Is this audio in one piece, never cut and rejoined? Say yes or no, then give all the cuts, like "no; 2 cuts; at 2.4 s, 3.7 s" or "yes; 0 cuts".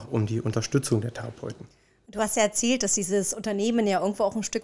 yes; 0 cuts